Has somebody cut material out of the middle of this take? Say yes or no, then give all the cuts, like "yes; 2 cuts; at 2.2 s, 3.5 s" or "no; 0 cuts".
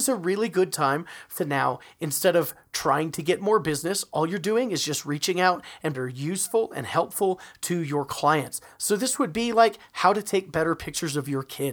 yes; 2 cuts; at 1.4 s, 5.9 s